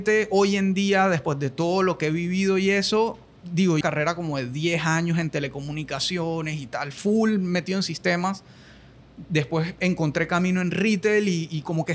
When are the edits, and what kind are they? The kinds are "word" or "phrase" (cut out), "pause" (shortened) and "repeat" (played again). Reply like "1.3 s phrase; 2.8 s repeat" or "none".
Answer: 3.8 s phrase

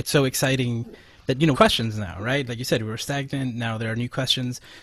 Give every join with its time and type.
1.5 s phrase

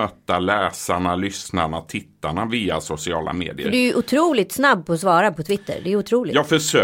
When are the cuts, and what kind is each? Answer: none

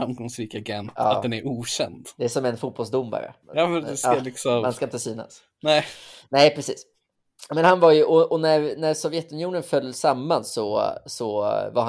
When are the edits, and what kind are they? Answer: 3.4 s pause

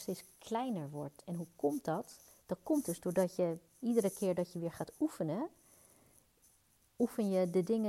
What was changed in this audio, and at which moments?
2.3 s pause

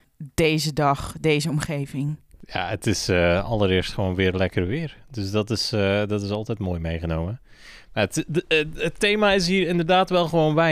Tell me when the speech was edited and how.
none

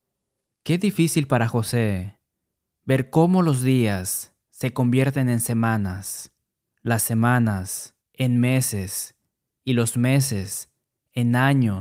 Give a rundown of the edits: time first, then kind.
8.0 s pause

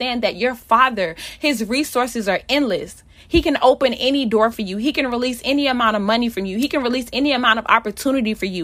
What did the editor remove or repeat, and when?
none

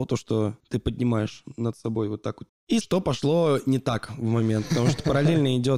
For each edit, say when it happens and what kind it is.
2.5 s word; 2.8 s word

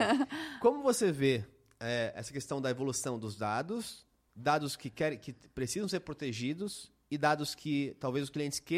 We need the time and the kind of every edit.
none

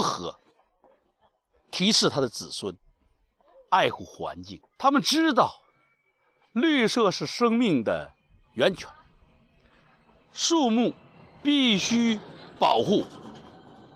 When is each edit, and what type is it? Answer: 4.7 s pause; 8.3 s pause; 11.1 s pause

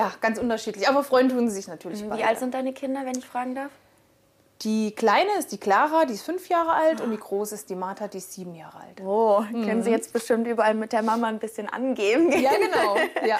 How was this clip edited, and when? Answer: none

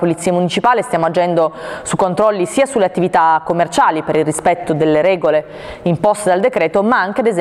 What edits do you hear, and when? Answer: none

